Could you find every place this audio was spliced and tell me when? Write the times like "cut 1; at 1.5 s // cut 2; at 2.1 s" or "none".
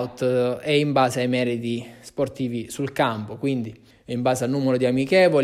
cut 1; at 3.9 s